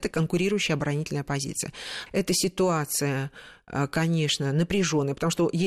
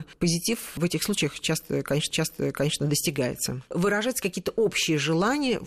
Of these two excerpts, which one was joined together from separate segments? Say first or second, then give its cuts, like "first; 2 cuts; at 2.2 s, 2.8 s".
second; 1 cut; at 2.1 s